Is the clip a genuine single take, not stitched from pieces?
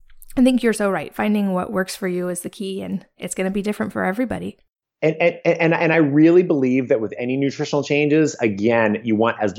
yes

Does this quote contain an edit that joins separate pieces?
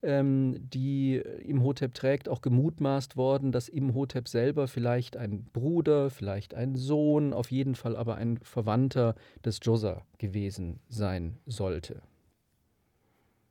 no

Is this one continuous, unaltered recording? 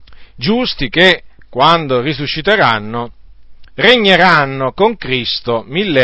yes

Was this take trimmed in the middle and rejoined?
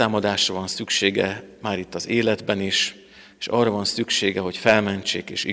no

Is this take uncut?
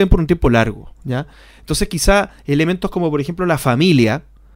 yes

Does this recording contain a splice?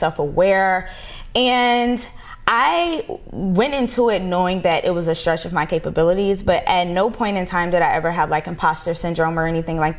no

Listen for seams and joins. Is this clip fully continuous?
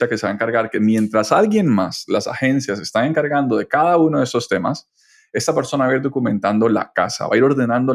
yes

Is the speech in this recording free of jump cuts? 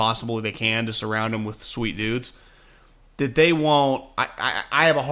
yes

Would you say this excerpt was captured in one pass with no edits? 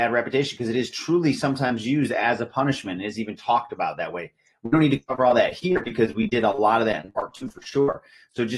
yes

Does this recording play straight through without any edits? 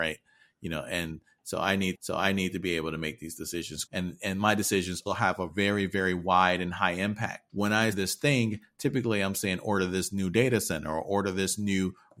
no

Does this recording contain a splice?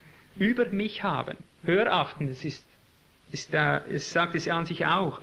yes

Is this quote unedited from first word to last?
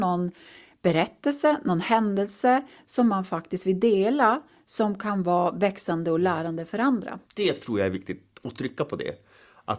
no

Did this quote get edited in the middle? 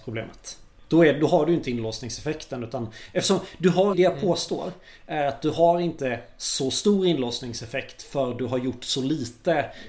yes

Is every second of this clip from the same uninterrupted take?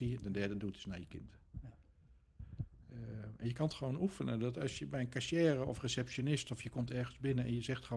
yes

